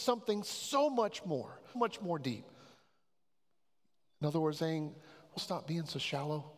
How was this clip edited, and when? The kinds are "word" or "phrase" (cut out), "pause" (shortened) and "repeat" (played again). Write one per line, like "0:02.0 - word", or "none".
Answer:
0:01.7 - word
0:04.6 - word
0:05.4 - word